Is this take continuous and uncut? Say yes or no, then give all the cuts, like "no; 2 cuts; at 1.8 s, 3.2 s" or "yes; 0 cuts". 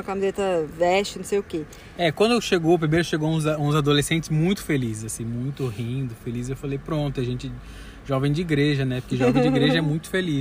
yes; 0 cuts